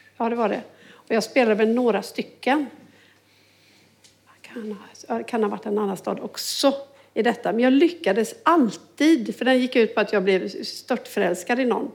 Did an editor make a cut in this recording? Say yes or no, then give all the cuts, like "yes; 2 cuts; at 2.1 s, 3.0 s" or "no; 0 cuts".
no; 0 cuts